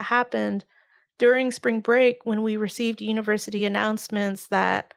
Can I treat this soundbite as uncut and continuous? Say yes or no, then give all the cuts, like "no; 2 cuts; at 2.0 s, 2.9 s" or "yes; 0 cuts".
yes; 0 cuts